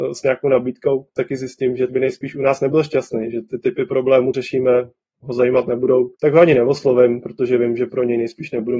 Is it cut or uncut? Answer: cut